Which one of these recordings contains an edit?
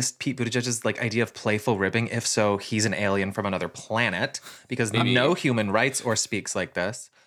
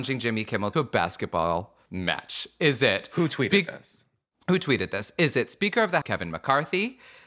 second; 1 cut; at 6.0 s

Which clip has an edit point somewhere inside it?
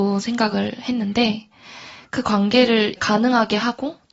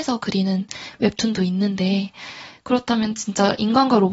first; 1 cut; at 3.0 s

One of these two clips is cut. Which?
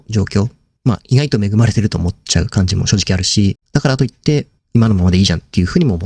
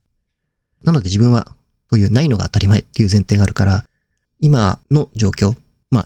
first; 2 cuts; at 3.6 s, 4.6 s

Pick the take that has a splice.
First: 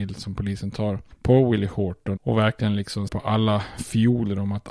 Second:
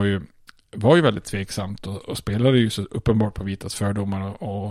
first; 2 cuts; at 2.2 s, 3.1 s

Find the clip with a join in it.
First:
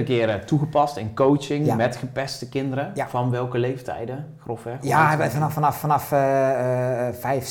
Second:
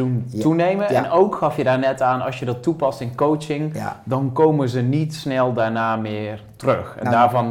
first; 1 cut; at 5.8 s

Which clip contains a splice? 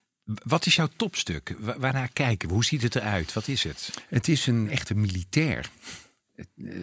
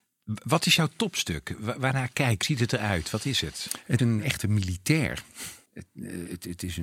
second; 3 cuts; at 2.4 s, 4.0 s, 5.7 s

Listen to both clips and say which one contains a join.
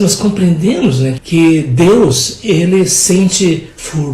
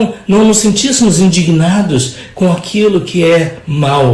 first; 1 cut; at 1.2 s

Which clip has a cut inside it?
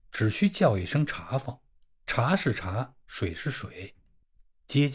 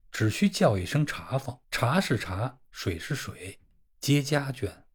second; 2 cuts; at 1.6 s, 3.9 s

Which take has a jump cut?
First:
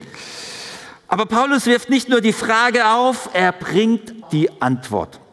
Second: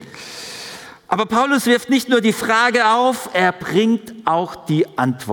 first; 1 cut; at 4.2 s

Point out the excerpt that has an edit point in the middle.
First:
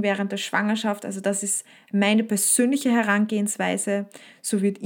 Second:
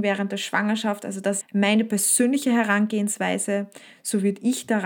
second; 1 cut; at 1.4 s

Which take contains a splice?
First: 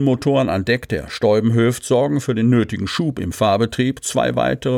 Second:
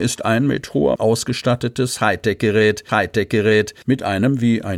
second; 2 cuts; at 1.0 s, 2.9 s

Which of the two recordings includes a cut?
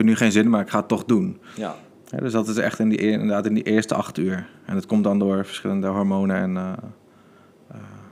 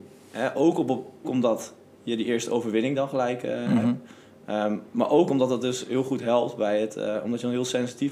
second; 2 cuts; at 1.2 s, 4.9 s

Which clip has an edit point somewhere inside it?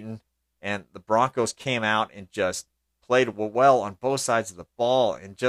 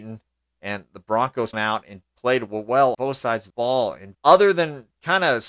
second; 5 cuts; at 1.5 s, 2.0 s, 2.9 s, 3.5 s, 4.1 s

